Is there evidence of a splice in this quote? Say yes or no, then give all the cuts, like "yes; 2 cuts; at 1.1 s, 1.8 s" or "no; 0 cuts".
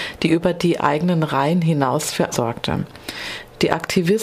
yes; 1 cut; at 2.3 s